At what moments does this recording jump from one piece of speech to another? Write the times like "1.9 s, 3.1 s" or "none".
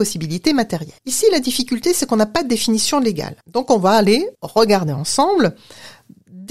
1.0 s, 3.4 s, 4.3 s